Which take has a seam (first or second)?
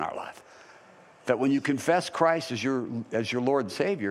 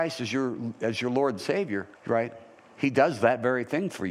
second